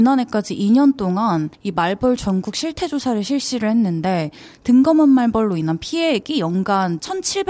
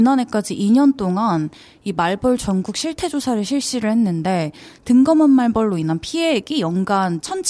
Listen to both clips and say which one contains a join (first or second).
first